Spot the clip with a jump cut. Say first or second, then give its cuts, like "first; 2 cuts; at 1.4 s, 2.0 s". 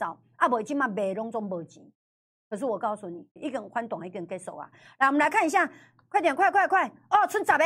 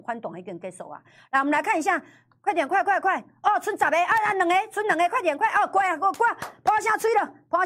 first; 1 cut; at 3.4 s